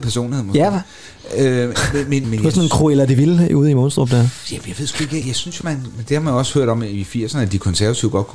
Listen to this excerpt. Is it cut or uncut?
cut